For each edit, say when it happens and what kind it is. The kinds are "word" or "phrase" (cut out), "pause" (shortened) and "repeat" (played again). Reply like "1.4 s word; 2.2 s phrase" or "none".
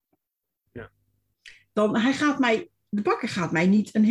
none